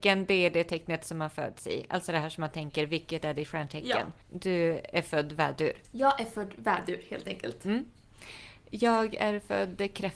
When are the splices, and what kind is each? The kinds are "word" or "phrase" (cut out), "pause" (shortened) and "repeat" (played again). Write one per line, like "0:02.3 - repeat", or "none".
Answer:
0:04.2 - pause